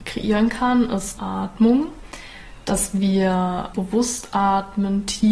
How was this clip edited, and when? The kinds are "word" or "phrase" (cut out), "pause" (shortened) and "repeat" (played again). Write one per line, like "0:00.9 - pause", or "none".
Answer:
0:01.2 - word
0:03.7 - word